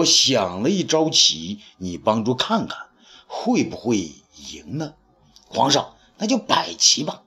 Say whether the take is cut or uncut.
uncut